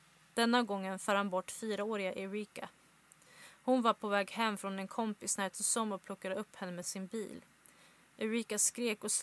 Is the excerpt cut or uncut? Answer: uncut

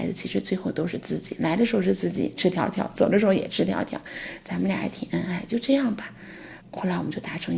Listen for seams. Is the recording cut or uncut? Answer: cut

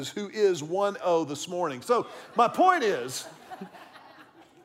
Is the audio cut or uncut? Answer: cut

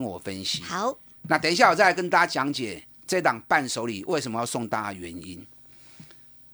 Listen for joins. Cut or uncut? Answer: uncut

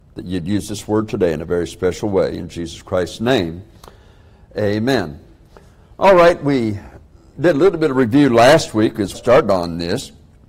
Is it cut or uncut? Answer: cut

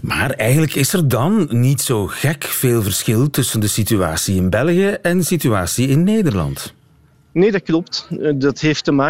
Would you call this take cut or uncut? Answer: uncut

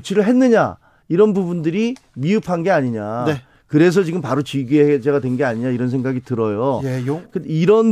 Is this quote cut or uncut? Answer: uncut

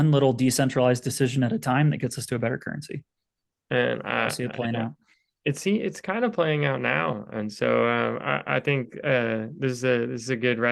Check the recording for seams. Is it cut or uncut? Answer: uncut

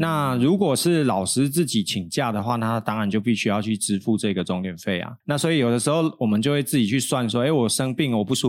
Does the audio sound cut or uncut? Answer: cut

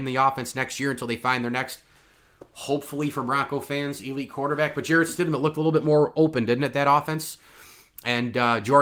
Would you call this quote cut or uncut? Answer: uncut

